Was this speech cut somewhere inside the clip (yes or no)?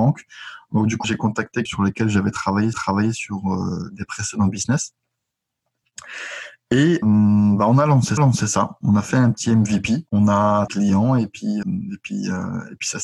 yes